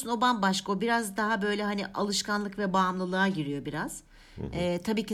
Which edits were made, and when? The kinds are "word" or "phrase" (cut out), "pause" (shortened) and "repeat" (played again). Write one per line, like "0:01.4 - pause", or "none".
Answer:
none